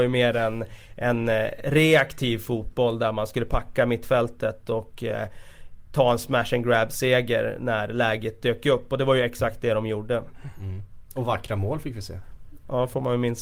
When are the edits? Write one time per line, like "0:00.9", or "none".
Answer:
none